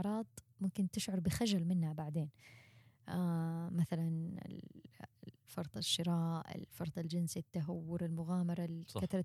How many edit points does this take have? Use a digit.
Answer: 1